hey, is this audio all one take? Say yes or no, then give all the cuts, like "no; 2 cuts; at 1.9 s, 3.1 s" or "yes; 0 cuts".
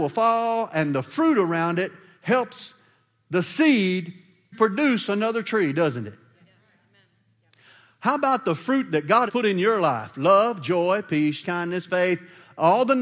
no; 4 cuts; at 4.5 s, 9.3 s, 11.4 s, 11.9 s